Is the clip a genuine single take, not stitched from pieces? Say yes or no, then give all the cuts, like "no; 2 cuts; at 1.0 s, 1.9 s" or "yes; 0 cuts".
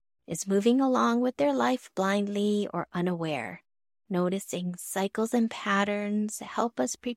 yes; 0 cuts